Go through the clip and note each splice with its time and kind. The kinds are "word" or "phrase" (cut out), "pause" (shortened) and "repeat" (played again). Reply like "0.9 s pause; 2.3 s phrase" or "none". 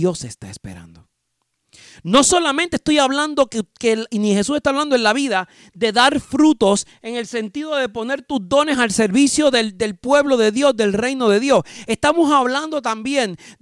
none